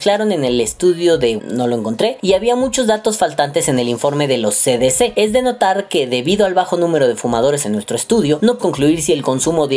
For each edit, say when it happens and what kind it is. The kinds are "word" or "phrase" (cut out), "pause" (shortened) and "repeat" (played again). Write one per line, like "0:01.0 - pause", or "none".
0:01.4 - word
0:07.6 - phrase
0:08.6 - word